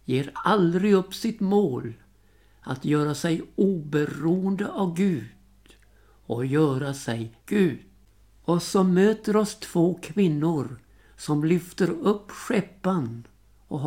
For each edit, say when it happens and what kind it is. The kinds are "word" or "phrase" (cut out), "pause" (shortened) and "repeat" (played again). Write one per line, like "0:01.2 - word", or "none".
0:07.4 - word